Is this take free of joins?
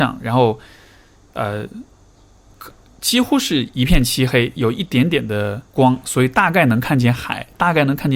no; 1 cut; at 5.7 s

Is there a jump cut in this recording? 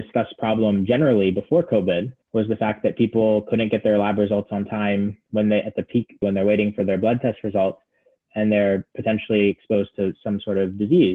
yes; 2 cuts; at 2.2 s, 6.2 s

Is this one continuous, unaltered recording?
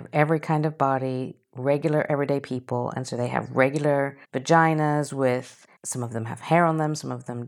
no; 2 cuts; at 4.2 s, 5.8 s

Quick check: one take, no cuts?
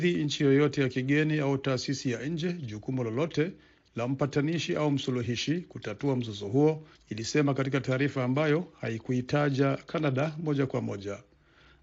yes; 0 cuts

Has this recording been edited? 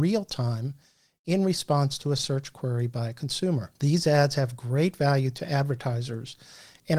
yes; 1 cut; at 3.7 s

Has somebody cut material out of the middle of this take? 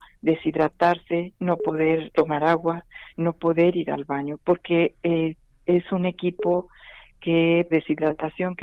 yes; 2 cuts; at 2.1 s, 7.7 s

